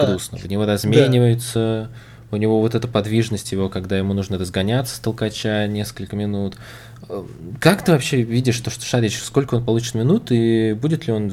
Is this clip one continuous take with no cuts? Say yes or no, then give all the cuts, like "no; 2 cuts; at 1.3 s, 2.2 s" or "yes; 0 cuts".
yes; 0 cuts